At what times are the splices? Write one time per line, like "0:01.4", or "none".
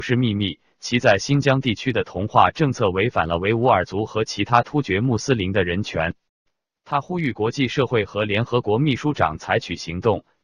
none